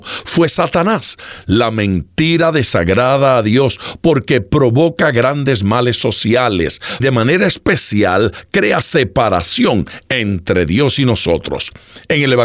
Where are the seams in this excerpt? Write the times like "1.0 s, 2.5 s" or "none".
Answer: 7.0 s